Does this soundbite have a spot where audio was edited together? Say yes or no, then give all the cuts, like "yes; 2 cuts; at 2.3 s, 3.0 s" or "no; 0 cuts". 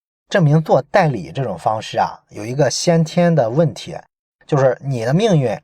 no; 0 cuts